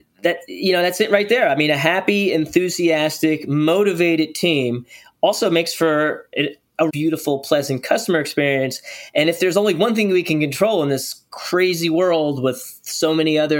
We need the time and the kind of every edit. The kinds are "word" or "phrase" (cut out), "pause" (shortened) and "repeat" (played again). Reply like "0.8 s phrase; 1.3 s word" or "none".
6.9 s word